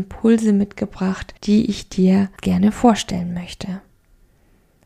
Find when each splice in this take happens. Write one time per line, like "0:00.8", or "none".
0:01.4
0:02.4